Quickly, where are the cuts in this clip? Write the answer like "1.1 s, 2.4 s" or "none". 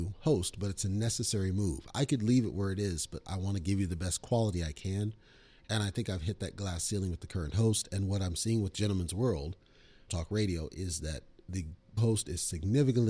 10.1 s, 12.0 s